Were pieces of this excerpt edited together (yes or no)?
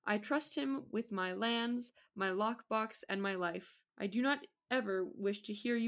yes